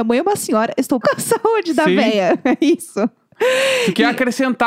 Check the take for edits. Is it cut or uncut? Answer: cut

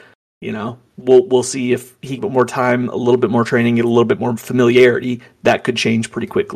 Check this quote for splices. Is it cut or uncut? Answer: cut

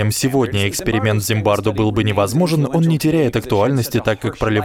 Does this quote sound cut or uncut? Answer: uncut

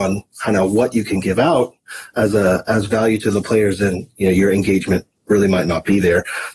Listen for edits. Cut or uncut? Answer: uncut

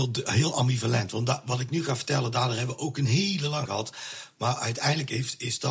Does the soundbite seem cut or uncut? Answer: cut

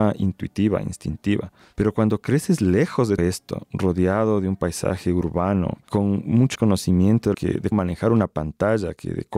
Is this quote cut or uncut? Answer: cut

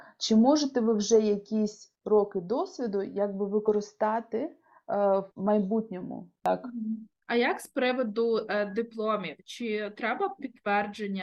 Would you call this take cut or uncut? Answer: cut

